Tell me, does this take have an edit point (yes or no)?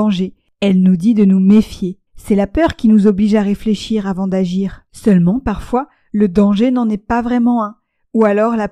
yes